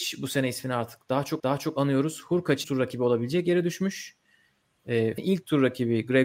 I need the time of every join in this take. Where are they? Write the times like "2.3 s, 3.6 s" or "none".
1.4 s, 2.6 s, 5.2 s